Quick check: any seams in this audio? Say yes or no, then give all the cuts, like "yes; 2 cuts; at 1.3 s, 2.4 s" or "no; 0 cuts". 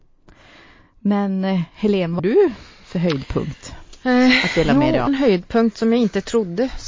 yes; 2 cuts; at 2.2 s, 5.1 s